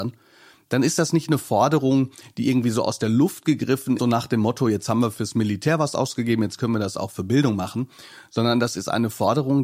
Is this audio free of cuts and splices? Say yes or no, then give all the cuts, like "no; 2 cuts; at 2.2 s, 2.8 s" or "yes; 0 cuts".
no; 1 cut; at 4.0 s